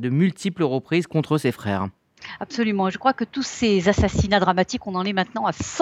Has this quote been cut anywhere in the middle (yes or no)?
no